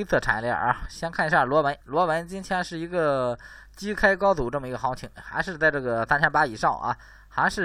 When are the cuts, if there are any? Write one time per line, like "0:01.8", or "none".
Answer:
0:01.8